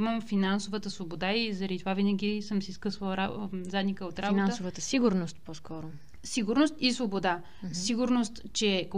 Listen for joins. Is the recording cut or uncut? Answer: uncut